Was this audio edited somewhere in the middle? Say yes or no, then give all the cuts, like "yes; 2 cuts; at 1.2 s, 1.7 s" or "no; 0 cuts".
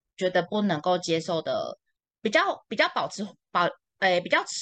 yes; 1 cut; at 2.0 s